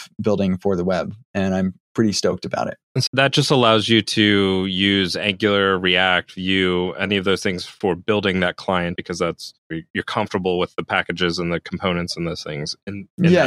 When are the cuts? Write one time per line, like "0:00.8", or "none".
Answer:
0:01.8
0:03.1
0:09.0
0:09.6